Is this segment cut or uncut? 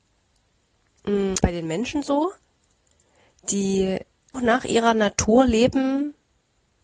cut